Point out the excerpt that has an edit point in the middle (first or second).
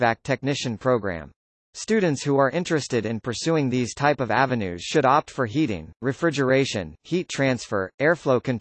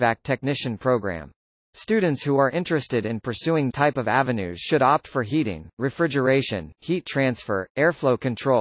second